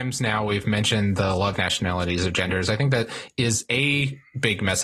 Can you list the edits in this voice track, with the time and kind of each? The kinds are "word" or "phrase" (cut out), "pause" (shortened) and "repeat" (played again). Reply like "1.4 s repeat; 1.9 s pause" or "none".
1.6 s phrase